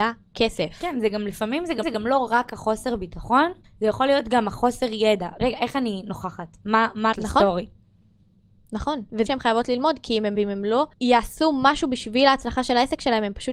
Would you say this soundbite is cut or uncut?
cut